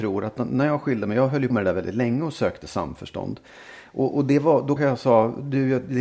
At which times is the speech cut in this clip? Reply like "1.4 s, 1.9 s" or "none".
1.5 s, 4.8 s

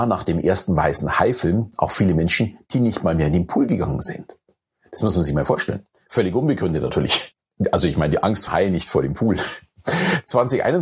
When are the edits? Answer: 8.5 s

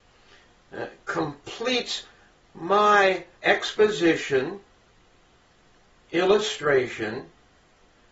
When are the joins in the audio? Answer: 3.4 s

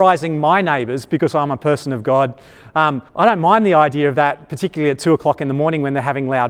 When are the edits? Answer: 3.1 s

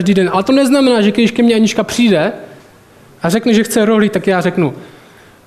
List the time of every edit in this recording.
none

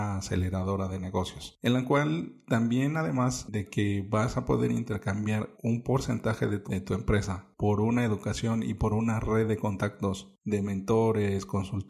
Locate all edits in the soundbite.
5.5 s, 6.7 s

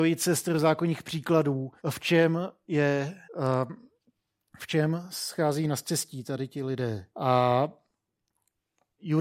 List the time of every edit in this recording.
1.8 s, 3.2 s, 7.1 s

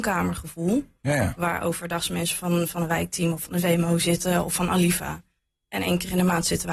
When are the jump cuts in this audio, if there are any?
none

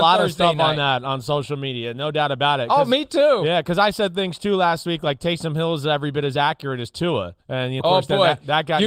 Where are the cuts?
7.4 s, 7.8 s

